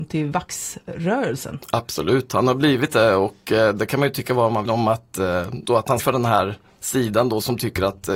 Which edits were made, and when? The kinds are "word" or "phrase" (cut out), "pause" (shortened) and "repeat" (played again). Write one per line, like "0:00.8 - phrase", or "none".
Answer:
0:04.7 - word
0:05.7 - word
0:06.0 - word